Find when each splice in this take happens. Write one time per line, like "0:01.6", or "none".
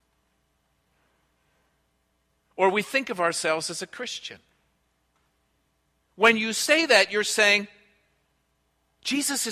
none